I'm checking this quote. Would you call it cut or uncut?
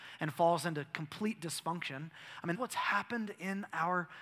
cut